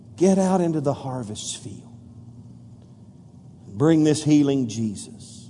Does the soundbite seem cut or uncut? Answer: uncut